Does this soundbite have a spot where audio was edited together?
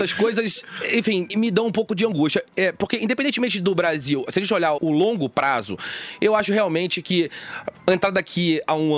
yes; 2 cuts; at 1.3 s, 4.8 s

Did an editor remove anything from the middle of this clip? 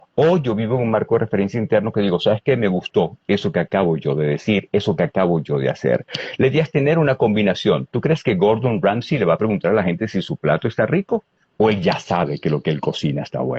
no; 0 cuts

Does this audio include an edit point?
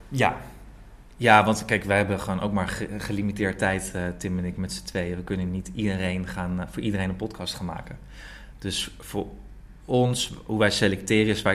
no; 0 cuts

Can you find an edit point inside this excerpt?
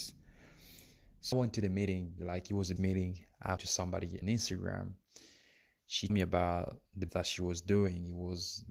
yes; 7 cuts; at 1.3 s, 2.2 s, 2.8 s, 3.6 s, 4.2 s, 6.1 s, 7.1 s

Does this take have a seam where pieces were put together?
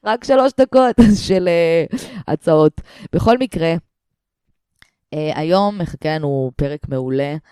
no; 0 cuts

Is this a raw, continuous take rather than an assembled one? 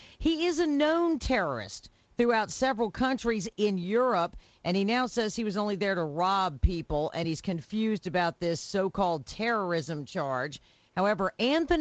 yes; 0 cuts

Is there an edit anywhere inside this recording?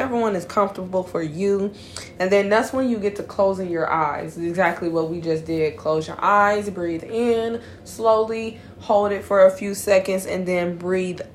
no; 0 cuts

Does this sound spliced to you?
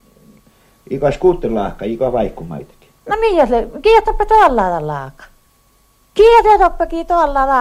no; 0 cuts

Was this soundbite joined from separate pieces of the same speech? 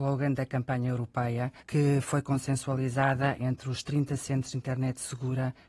yes; 1 cut; at 1.6 s

